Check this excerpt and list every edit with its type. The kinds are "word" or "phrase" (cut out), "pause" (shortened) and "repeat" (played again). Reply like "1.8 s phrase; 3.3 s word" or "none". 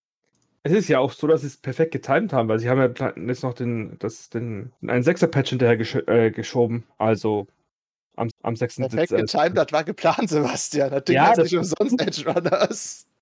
4.8 s pause; 8.3 s repeat